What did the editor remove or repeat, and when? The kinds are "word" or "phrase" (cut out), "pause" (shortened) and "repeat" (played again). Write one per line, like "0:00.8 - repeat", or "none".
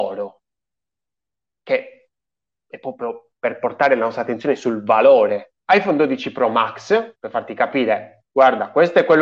0:05.6 - pause
0:07.2 - pause